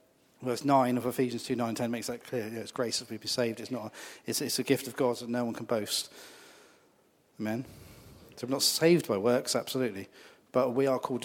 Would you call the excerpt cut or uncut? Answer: uncut